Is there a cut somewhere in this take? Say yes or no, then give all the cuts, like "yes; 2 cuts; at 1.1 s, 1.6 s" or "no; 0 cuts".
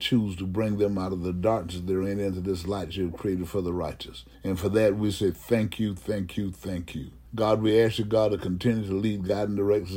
yes; 2 cuts; at 4.3 s, 7.3 s